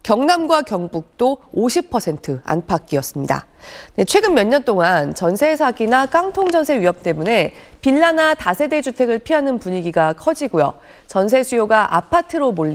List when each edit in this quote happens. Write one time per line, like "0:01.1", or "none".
none